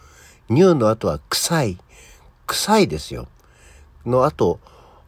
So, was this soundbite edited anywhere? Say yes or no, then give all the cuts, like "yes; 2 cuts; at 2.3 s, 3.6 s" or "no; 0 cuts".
no; 0 cuts